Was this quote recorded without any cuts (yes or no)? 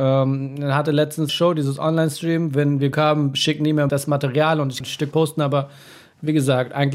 no